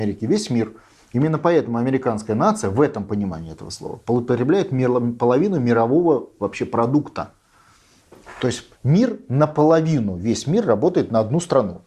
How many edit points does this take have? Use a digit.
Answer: 1